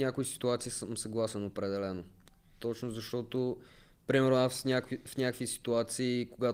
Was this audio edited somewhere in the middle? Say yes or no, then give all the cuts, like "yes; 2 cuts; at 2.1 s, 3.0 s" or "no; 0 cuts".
no; 0 cuts